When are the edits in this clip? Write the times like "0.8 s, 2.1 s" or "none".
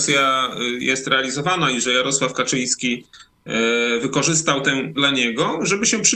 4.9 s